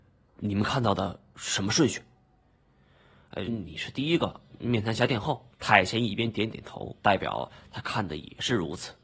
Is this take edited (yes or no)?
yes